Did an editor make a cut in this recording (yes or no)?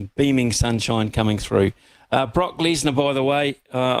no